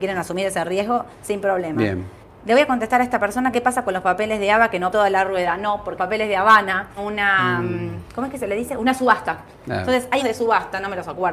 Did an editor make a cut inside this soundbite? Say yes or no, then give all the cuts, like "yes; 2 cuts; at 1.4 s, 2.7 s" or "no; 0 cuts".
yes; 7 cuts; at 1.1 s, 2.2 s, 3.5 s, 4.9 s, 6.0 s, 7.0 s, 10.2 s